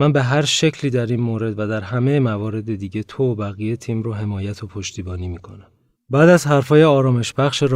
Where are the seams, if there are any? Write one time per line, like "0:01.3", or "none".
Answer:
0:06.0